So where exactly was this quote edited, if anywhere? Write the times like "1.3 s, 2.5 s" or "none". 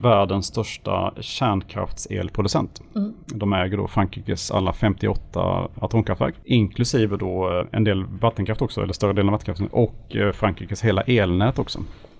none

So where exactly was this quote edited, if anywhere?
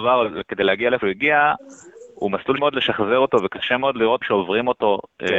1.0 s, 2.6 s, 4.2 s

